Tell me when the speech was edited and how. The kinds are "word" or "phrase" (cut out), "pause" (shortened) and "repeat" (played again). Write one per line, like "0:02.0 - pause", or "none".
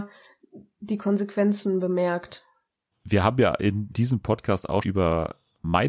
0:03.9 - word
0:04.8 - word